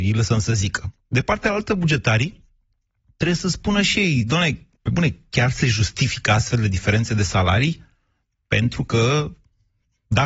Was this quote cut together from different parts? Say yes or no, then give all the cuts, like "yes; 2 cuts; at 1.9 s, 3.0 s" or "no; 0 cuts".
no; 0 cuts